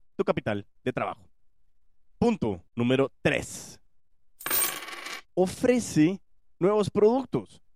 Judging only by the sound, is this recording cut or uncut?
cut